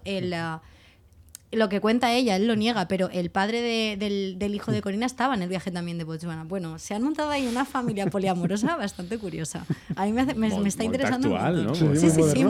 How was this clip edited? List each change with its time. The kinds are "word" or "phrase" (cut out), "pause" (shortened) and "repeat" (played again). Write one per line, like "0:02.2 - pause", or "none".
none